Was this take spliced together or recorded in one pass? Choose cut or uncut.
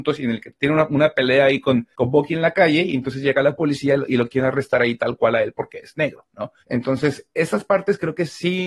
cut